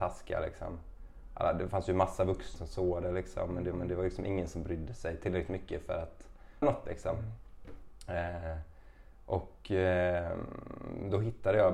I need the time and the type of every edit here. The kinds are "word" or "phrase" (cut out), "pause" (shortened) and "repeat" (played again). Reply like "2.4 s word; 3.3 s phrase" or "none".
2.6 s word; 3.7 s repeat; 6.6 s word